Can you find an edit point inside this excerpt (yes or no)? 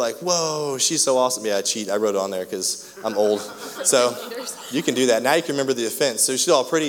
no